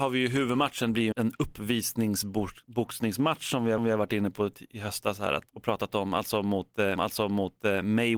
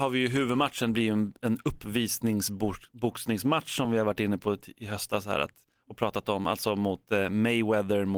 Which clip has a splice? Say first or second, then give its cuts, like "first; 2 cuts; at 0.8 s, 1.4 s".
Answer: first; 4 cuts; at 1.1 s, 3.8 s, 5.5 s, 7.0 s